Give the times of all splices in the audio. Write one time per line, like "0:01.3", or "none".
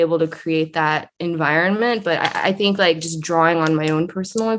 0:01.1